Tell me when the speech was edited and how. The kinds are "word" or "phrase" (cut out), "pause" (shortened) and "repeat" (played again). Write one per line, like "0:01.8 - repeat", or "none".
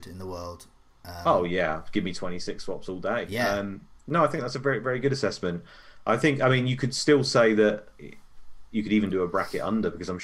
none